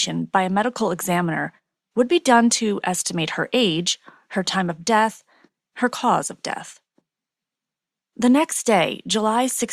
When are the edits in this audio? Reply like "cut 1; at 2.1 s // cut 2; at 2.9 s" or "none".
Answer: none